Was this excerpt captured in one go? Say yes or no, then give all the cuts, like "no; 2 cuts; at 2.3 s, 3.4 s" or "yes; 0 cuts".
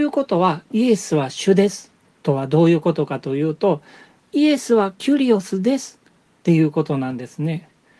yes; 0 cuts